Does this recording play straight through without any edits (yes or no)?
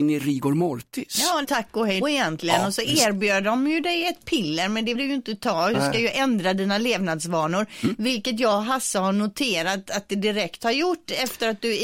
no